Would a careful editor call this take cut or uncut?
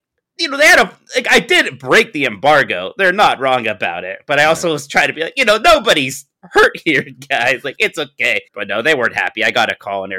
cut